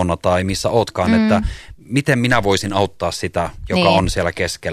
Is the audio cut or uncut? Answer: uncut